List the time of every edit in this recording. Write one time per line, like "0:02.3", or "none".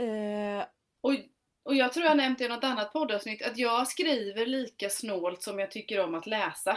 none